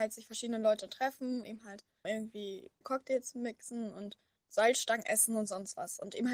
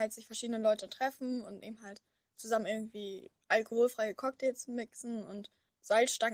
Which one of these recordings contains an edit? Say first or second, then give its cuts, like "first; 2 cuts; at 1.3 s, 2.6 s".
first; 3 cuts; at 1.4 s, 2.0 s, 2.8 s